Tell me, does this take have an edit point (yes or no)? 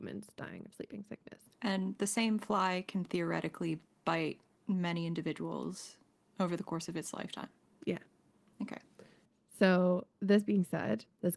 yes